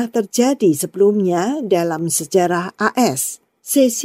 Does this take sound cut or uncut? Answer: uncut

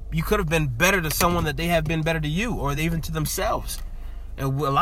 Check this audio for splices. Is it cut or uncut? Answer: uncut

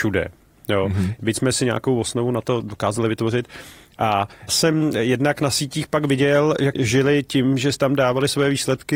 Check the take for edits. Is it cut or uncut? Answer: cut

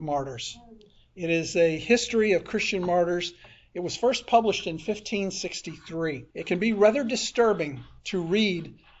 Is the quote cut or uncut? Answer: cut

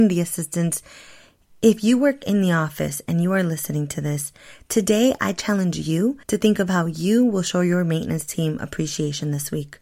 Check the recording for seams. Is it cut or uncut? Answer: cut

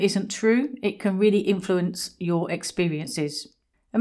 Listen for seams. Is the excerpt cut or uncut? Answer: uncut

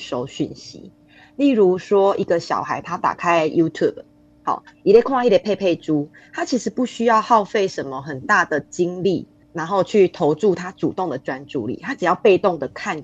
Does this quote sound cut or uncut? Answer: uncut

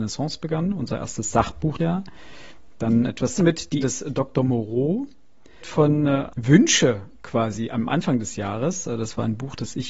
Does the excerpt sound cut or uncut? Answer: cut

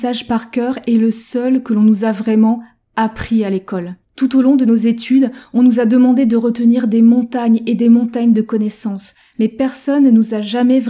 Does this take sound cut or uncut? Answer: uncut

